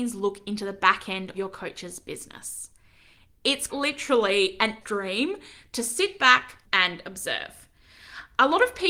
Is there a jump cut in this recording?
yes; 4 cuts; at 1.3 s, 3.7 s, 4.8 s, 6.6 s

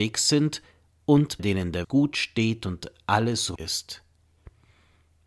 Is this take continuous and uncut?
no; 3 cuts; at 1.4 s, 1.8 s, 3.6 s

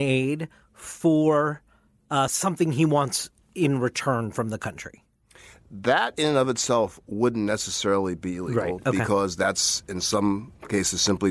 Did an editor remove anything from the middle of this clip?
no; 0 cuts

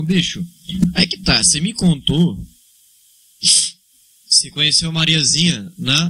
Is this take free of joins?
yes; 0 cuts

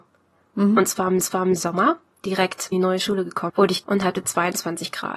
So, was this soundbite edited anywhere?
yes; 4 cuts; at 1.2 s, 2.7 s, 3.5 s, 3.8 s

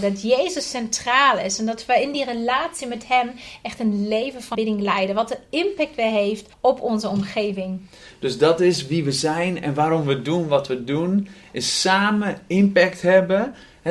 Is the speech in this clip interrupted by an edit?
yes; 2 cuts; at 4.5 s, 6.5 s

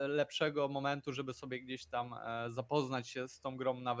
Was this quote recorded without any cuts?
yes; 0 cuts

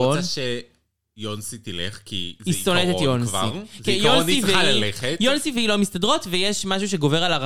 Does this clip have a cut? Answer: no; 0 cuts

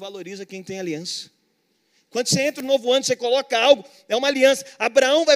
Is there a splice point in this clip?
no; 0 cuts

